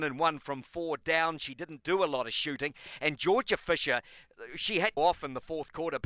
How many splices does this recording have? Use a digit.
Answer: 1